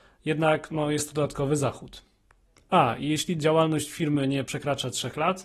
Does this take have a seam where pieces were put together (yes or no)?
no